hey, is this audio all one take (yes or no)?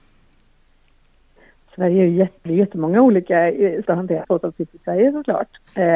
no